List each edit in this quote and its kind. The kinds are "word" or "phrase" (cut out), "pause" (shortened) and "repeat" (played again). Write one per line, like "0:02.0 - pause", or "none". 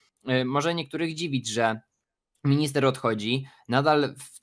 none